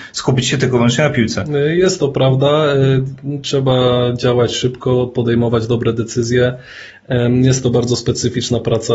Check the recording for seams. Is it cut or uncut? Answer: uncut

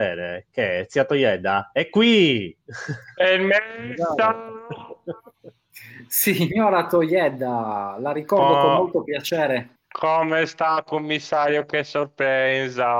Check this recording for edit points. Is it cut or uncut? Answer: cut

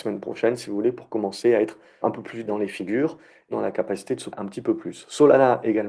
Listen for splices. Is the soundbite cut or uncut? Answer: cut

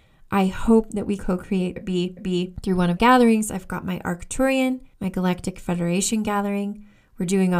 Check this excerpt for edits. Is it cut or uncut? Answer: cut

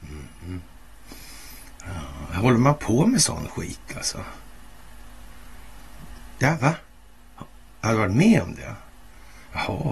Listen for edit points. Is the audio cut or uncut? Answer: uncut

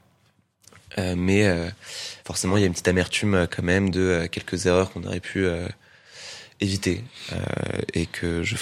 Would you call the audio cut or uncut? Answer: cut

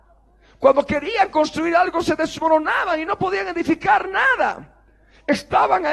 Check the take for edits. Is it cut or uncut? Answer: uncut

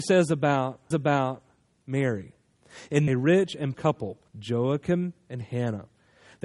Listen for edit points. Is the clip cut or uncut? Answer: cut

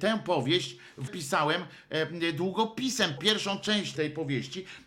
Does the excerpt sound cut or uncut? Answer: cut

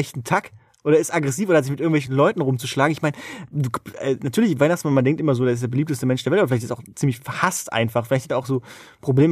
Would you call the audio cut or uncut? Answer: uncut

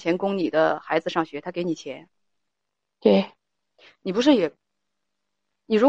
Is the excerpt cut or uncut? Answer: uncut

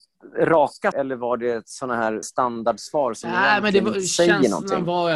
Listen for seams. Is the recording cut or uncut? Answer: cut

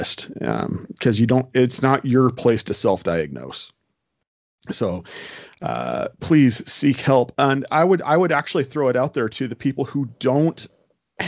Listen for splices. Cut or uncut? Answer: uncut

